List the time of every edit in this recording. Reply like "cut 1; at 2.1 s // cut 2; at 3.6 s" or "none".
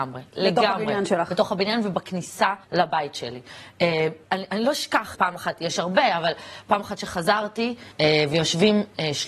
cut 1; at 2.6 s // cut 2; at 4.2 s // cut 3; at 5.1 s // cut 4; at 7.9 s